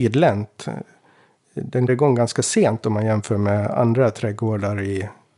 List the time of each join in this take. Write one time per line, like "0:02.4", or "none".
0:01.9